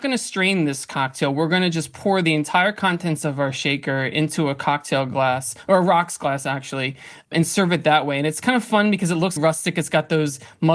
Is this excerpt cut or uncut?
cut